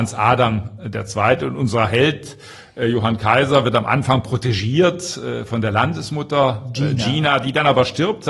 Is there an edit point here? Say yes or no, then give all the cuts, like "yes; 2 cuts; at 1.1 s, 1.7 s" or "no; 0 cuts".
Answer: no; 0 cuts